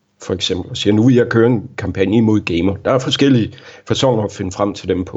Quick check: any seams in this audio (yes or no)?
no